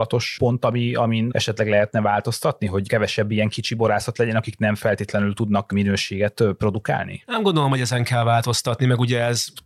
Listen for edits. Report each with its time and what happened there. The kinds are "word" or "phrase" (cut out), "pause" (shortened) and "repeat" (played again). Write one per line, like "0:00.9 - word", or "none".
none